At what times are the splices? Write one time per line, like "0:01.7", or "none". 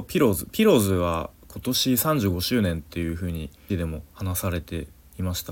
0:03.7
0:04.1